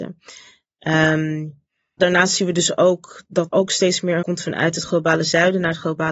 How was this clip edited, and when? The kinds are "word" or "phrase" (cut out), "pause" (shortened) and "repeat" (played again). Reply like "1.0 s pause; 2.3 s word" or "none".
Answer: 2.0 s word; 3.5 s word; 4.2 s word

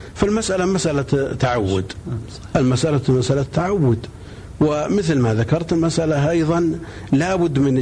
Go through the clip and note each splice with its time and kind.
none

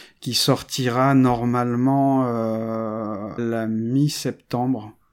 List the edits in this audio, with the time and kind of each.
3.4 s word

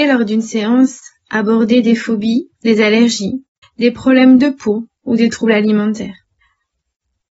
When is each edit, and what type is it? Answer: 2.5 s pause; 3.6 s pause; 5.0 s pause

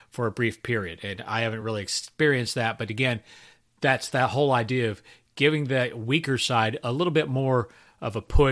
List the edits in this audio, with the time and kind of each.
none

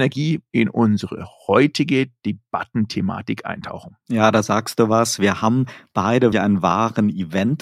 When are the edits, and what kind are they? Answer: 6.3 s word

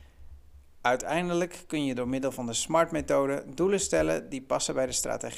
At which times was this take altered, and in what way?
none

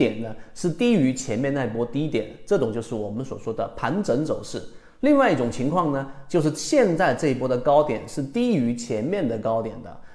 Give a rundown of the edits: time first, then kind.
none

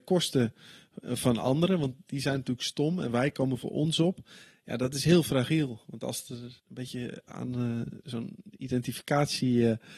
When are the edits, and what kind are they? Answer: 6.6 s pause

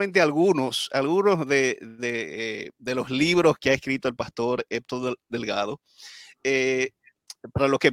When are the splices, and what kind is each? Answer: none

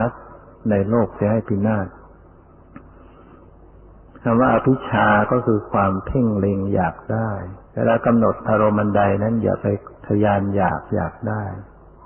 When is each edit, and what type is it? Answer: 7.6 s pause; 10.0 s pause

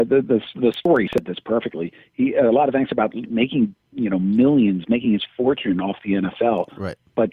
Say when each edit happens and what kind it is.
none

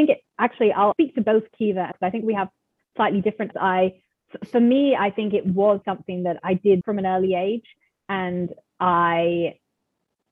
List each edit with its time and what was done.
0.9 s word; 1.9 s word; 3.5 s word; 5.8 s word; 6.4 s word; 6.8 s word

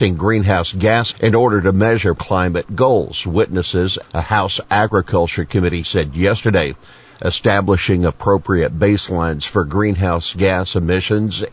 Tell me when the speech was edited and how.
1.1 s word; 2.2 s phrase; 4.0 s word; 5.8 s word

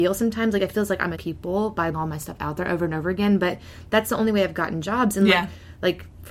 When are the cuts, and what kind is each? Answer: 1.1 s word; 1.9 s word

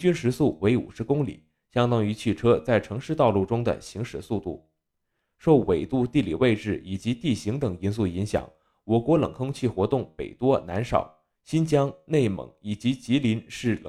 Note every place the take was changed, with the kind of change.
11.3 s pause

